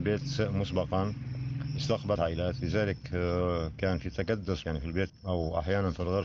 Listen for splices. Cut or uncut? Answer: cut